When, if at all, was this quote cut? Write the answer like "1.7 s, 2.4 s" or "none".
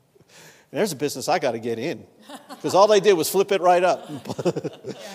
none